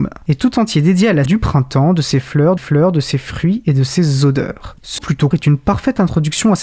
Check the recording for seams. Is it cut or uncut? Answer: cut